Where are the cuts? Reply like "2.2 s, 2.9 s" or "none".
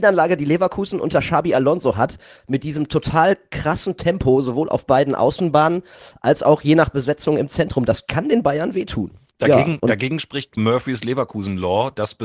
10.6 s